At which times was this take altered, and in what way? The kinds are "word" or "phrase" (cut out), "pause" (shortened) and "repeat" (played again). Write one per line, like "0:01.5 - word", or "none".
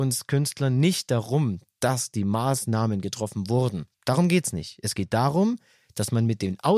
0:03.9 - pause